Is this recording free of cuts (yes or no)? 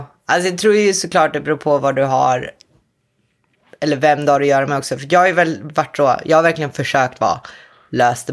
yes